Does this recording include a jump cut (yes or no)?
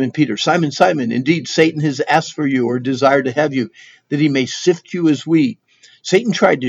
no